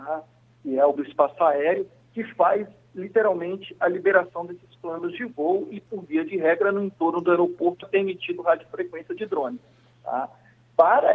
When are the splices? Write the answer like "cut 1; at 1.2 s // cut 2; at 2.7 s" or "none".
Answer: cut 1; at 1.0 s // cut 2; at 7.8 s